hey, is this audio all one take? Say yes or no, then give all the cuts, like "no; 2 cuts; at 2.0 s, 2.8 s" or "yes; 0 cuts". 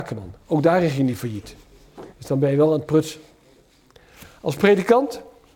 no; 1 cut; at 2.1 s